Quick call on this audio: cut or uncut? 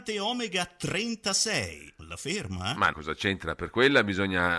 cut